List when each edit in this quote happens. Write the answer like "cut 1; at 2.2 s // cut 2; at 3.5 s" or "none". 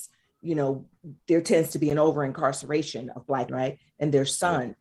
cut 1; at 1.2 s // cut 2; at 3.5 s